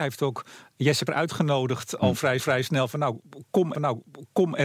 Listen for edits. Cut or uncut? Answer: cut